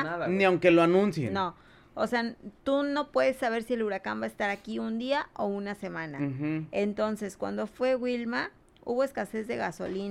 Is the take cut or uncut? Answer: uncut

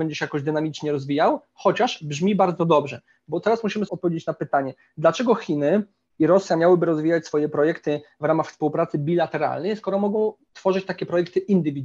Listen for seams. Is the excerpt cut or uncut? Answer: cut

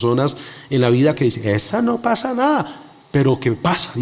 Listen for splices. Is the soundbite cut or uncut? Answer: cut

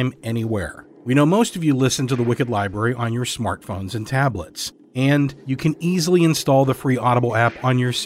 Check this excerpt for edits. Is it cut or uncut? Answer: cut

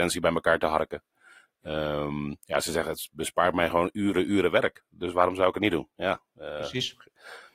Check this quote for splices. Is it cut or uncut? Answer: uncut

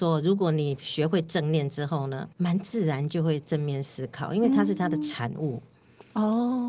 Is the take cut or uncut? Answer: cut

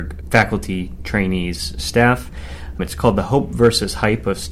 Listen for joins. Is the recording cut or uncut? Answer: uncut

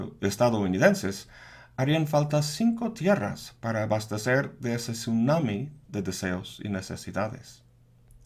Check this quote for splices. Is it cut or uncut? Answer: uncut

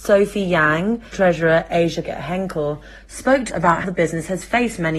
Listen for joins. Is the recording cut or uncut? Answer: cut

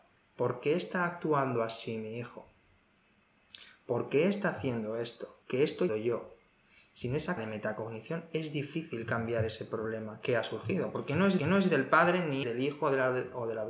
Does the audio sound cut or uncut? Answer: cut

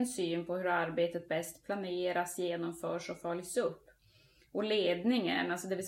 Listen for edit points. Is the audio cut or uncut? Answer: uncut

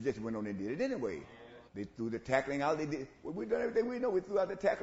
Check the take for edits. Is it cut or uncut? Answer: cut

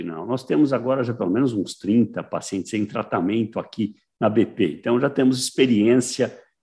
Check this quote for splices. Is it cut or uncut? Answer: uncut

